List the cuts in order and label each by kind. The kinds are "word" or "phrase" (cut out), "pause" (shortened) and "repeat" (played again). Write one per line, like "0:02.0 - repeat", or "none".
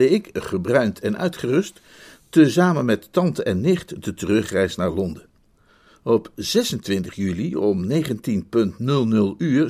none